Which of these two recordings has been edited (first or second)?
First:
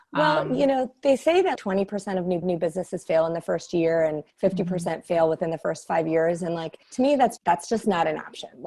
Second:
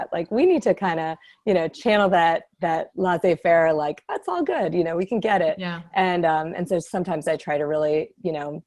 first